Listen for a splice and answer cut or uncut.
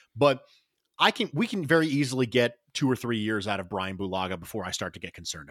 uncut